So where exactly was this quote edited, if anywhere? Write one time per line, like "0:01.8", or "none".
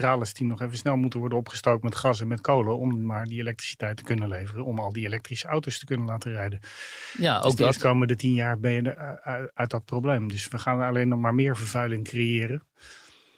0:08.9